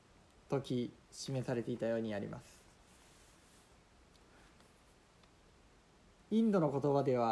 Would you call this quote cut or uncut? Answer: uncut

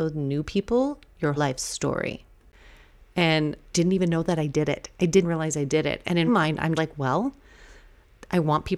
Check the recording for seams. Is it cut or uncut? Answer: cut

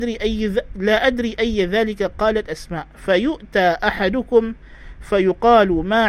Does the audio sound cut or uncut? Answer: uncut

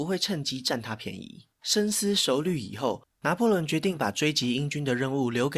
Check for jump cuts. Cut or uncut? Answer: cut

